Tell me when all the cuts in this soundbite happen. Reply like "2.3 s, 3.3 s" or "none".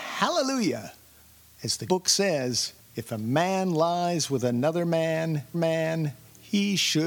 1.4 s, 1.9 s, 2.8 s, 5.5 s